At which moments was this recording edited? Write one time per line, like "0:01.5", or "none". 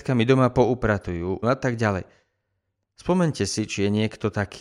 0:01.4